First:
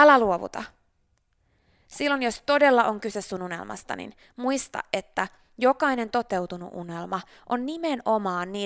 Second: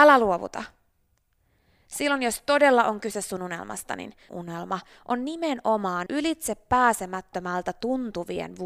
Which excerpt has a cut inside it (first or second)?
second